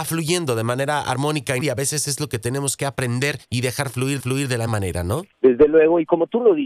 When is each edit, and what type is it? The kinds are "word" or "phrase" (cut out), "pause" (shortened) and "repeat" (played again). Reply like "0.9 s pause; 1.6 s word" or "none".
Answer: 1.6 s word; 3.4 s pause; 4.2 s repeat; 4.7 s word; 5.3 s pause